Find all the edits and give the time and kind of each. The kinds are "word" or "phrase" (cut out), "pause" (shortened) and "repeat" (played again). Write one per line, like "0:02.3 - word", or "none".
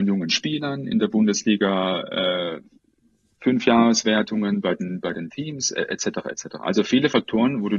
none

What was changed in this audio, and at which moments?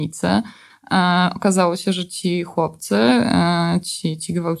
none

